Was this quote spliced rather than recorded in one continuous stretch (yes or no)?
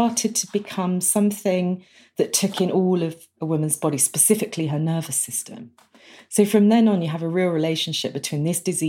no